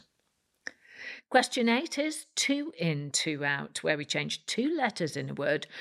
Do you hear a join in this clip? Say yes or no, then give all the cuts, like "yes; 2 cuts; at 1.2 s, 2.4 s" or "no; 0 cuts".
no; 0 cuts